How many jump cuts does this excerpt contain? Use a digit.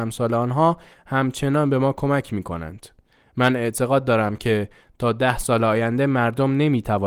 0